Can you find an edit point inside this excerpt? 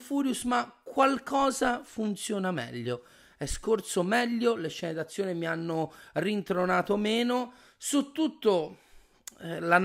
no; 0 cuts

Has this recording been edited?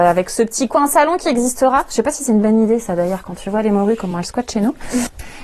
no; 0 cuts

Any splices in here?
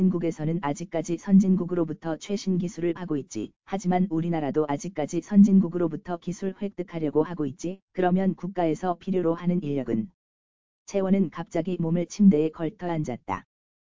yes; 4 cuts; at 3.0 s, 3.6 s, 7.8 s, 12.1 s

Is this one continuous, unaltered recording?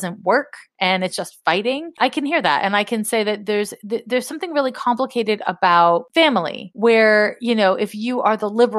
yes; 0 cuts

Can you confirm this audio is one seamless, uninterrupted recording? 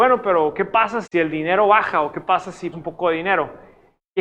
no; 2 cuts; at 1.0 s, 2.7 s

